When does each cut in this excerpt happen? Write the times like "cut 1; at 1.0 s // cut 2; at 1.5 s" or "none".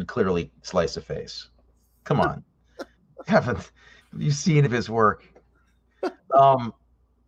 cut 1; at 3.3 s // cut 2; at 4.0 s // cut 3; at 4.6 s